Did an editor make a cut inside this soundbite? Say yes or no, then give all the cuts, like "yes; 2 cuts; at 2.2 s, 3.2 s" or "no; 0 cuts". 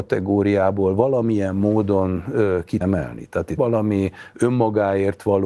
yes; 2 cuts; at 2.8 s, 3.6 s